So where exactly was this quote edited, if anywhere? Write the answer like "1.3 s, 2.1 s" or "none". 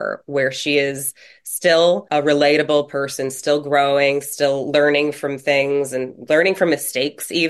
none

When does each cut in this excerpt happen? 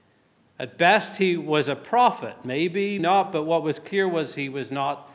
3.0 s

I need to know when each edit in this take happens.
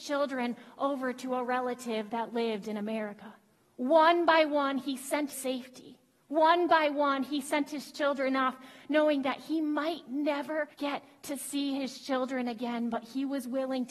5.3 s, 10.7 s

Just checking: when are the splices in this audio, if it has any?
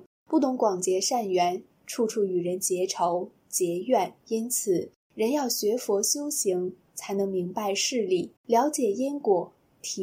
4.2 s, 8.4 s

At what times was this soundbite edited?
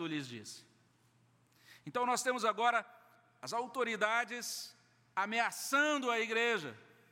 none

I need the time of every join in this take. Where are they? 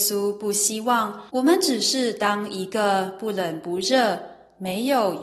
1.3 s

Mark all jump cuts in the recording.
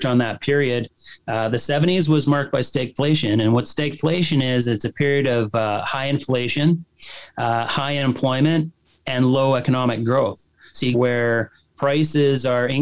10.9 s

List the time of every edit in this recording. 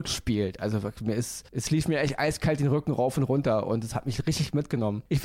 none

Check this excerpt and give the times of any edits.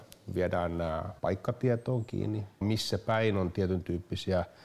1.2 s, 2.6 s

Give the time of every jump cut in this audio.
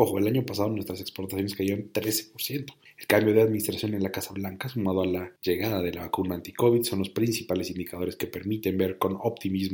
2.9 s, 5.4 s

